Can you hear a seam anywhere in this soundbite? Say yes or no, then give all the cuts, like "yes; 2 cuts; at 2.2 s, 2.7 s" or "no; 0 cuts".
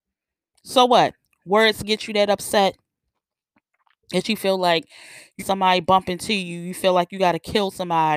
yes; 1 cut; at 5.4 s